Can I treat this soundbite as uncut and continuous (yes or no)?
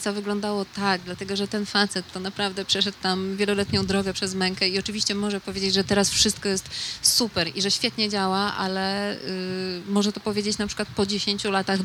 yes